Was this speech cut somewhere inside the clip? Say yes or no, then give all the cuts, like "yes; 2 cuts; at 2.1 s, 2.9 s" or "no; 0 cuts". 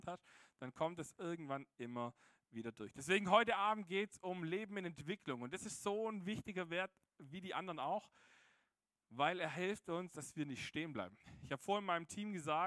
no; 0 cuts